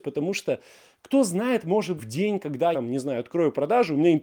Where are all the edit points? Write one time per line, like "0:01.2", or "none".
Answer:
0:02.0
0:02.7